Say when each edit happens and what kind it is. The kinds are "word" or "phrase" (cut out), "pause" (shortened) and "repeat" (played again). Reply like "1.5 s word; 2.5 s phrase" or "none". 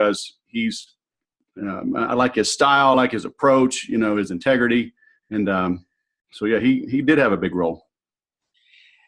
none